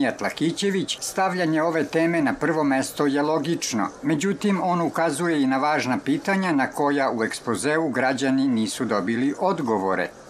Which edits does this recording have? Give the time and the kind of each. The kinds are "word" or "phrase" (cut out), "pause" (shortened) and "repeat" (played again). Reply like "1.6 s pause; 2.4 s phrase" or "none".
none